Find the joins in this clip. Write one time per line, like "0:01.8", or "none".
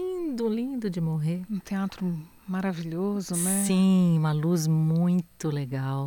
none